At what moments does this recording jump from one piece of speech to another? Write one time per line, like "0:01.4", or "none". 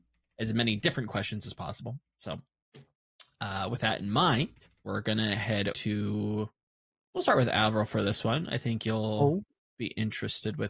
0:04.8
0:05.7